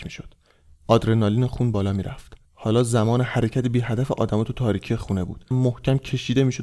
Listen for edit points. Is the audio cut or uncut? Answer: cut